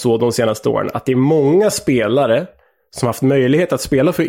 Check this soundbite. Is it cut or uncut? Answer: uncut